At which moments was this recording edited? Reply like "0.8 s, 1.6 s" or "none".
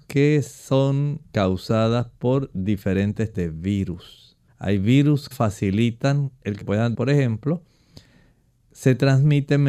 1.3 s, 3.3 s, 4.5 s, 5.3 s, 6.6 s, 6.9 s